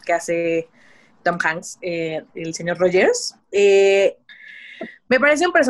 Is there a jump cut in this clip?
yes; 2 cuts; at 2.3 s, 3.4 s

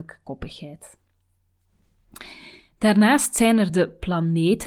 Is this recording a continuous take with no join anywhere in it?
yes; 0 cuts

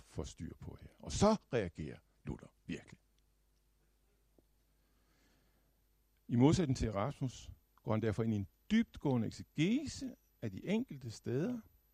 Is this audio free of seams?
yes; 0 cuts

